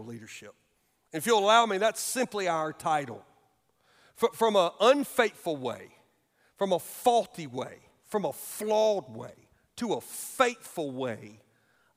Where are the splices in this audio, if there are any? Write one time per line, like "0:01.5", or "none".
none

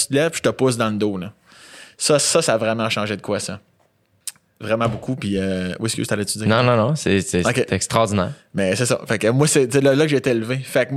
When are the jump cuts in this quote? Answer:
none

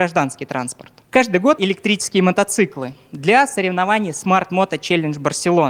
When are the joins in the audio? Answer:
0:01.6

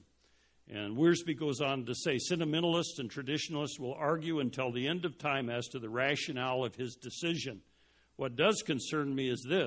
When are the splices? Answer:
none

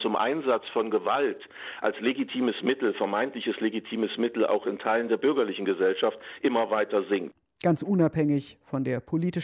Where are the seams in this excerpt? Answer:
none

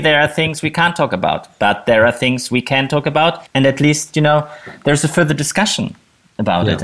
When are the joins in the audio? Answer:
0:03.5

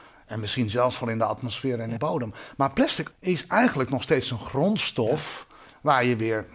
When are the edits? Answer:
0:02.0
0:03.1

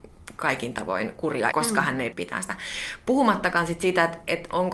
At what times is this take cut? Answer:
0:01.5
0:02.1

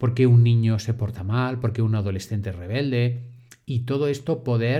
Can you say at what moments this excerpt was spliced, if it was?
none

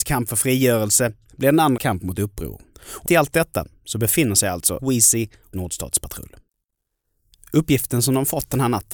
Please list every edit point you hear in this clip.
0:01.8
0:03.1
0:04.8
0:05.5

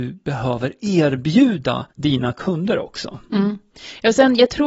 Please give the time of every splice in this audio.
0:01.9

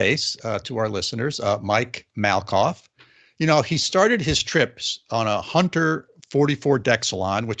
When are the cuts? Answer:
none

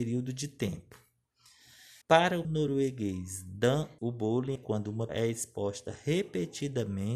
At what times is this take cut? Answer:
0:02.0
0:02.4
0:04.0
0:04.6
0:05.1

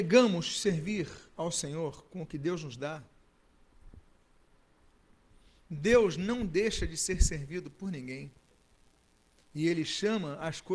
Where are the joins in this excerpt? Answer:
0:01.3

